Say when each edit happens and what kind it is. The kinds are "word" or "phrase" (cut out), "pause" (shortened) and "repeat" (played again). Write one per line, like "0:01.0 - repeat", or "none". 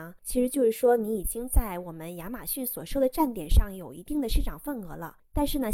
none